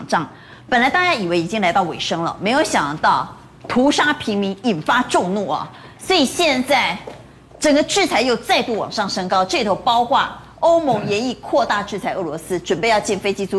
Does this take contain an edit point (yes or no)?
no